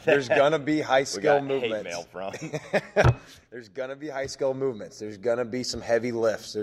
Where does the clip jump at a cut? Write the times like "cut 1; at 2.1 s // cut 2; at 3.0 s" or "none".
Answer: none